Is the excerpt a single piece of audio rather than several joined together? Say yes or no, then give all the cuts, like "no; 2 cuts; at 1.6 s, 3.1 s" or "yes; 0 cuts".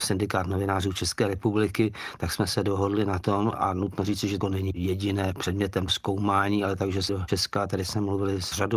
no; 3 cuts; at 4.4 s, 5.9 s, 7.1 s